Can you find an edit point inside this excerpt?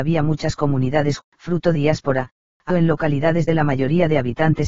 yes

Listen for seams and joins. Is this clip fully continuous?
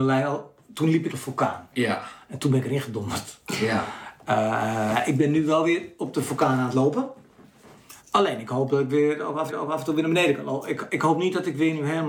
no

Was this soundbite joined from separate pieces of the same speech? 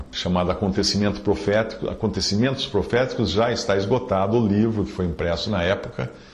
no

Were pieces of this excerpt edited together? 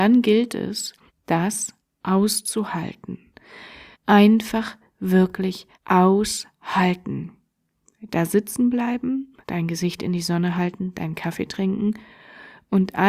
yes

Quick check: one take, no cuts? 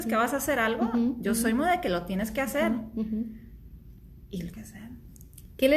no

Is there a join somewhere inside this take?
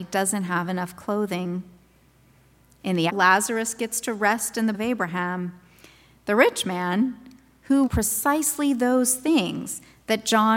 yes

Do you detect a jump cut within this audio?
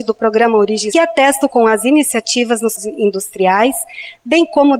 yes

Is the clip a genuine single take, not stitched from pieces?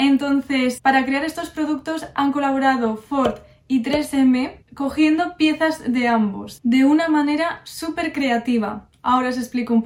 yes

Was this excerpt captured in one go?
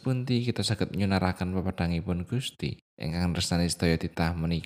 no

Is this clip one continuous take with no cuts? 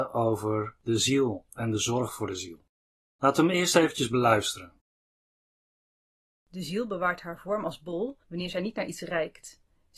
no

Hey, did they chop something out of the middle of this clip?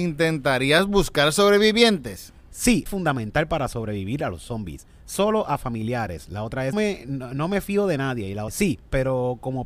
yes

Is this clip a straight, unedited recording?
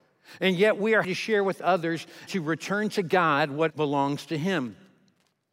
no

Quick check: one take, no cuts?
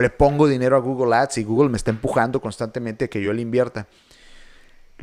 yes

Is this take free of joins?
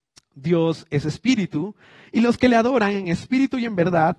yes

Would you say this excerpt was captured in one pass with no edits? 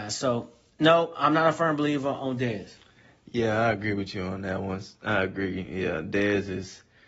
yes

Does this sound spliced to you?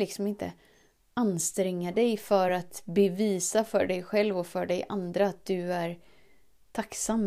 no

